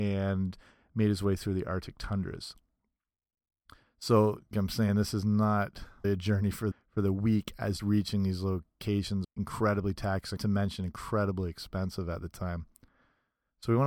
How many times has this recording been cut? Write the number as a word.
six